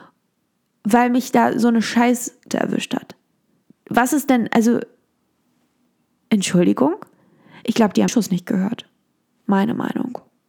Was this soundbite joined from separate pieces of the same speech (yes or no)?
yes